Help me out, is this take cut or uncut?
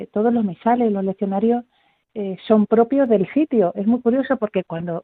uncut